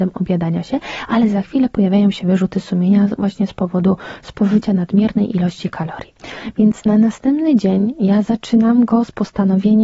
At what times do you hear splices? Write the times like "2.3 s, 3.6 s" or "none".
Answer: none